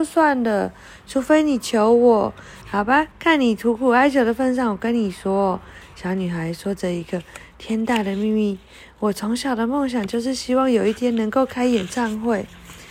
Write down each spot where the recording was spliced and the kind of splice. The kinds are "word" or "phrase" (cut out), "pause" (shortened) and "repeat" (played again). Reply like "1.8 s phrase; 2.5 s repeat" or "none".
2.6 s phrase; 3.1 s pause